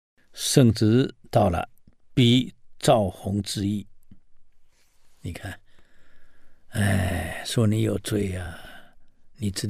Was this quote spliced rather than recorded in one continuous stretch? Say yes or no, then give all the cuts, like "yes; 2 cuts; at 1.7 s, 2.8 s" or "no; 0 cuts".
no; 0 cuts